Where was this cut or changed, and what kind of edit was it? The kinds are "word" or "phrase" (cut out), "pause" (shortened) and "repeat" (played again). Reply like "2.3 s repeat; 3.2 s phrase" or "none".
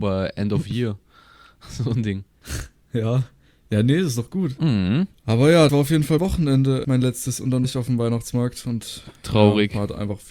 5.1 s pause; 5.7 s word; 6.2 s word; 6.8 s word; 7.6 s word